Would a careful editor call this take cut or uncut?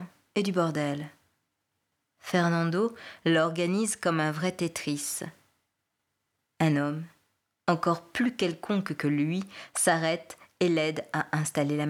uncut